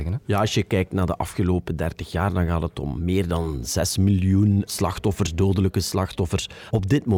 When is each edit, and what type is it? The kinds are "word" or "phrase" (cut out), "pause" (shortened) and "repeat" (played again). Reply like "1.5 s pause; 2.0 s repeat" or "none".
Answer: 4.7 s word